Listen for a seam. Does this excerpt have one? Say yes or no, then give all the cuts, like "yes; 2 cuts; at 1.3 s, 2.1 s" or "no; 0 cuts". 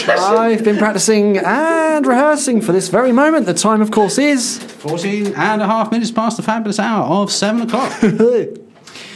no; 0 cuts